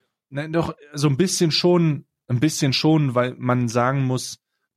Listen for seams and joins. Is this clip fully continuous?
yes; 0 cuts

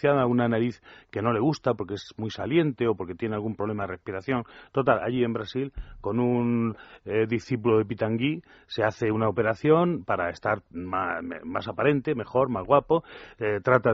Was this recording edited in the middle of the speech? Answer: no; 0 cuts

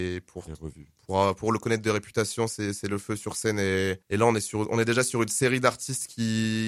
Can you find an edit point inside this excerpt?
yes; 1 cut; at 4.0 s

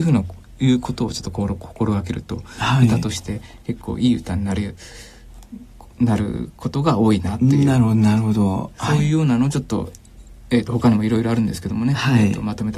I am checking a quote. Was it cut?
no; 0 cuts

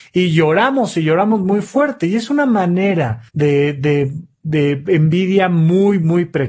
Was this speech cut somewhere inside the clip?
yes; 1 cut; at 3.3 s

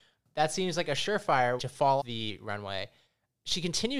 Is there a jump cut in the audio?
yes; 2 cuts; at 1.6 s, 2.0 s

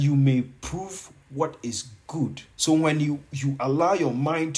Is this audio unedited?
no; 1 cut; at 2.5 s

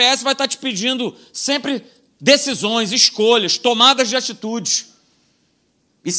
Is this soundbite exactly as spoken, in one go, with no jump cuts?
yes; 0 cuts

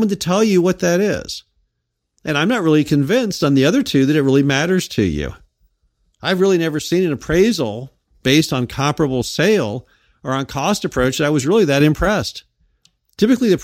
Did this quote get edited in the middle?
no; 0 cuts

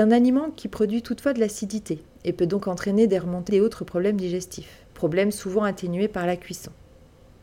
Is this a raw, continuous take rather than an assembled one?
no; 2 cuts; at 3.5 s, 4.9 s

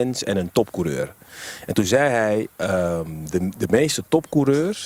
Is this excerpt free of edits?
yes; 0 cuts

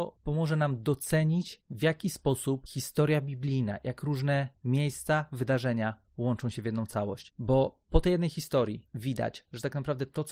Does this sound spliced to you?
yes; 2 cuts; at 4.6 s, 6.1 s

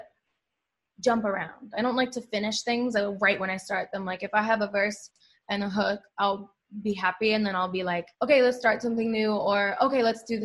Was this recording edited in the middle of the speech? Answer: yes; 1 cut; at 8.1 s

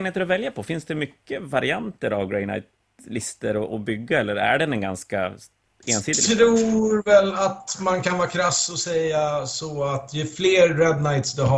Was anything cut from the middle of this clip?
no; 0 cuts

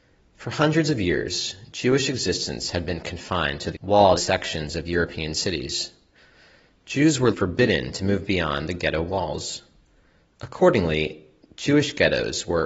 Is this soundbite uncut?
no; 3 cuts; at 3.7 s, 4.2 s, 7.3 s

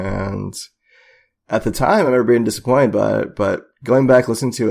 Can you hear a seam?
no; 0 cuts

